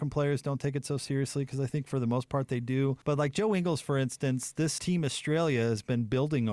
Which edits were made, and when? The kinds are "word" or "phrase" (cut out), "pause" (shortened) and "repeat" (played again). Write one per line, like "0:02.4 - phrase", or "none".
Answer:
0:03.0 - pause
0:04.8 - word

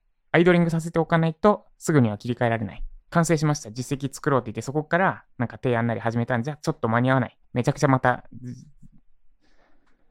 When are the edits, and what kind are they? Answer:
0:03.0 - pause
0:07.4 - pause

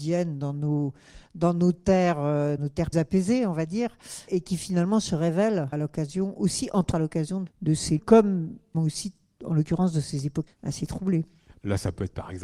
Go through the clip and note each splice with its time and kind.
0:02.6 - word
0:02.9 - word
0:04.3 - word
0:05.7 - word
0:06.9 - word
0:07.5 - word
0:08.0 - word
0:08.7 - word
0:10.5 - word

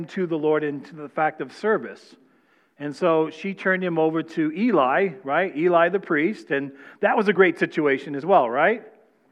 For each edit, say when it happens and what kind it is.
none

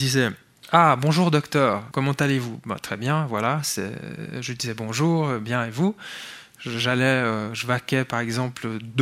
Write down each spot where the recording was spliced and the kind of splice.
none

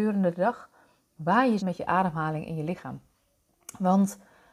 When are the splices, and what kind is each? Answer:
0:01.6 - word

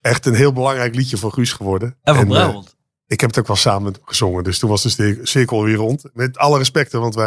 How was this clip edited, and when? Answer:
none

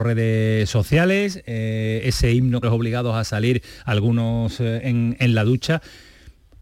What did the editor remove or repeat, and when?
0:02.6 - phrase

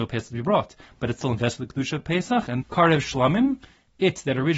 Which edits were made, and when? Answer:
0:02.6 - word

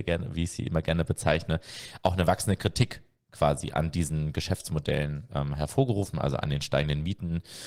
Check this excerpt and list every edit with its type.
none

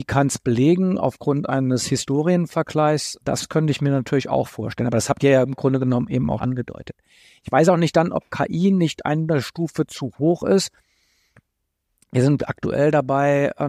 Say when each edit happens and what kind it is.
0:03.2 - pause
0:06.4 - word

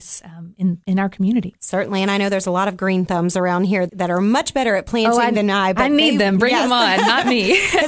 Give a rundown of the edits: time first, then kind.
0:03.9 - word

